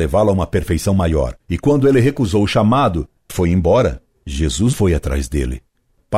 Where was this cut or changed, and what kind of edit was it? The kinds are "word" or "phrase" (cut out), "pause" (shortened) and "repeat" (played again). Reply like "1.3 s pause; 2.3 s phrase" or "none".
1.4 s pause; 3.3 s word; 4.7 s word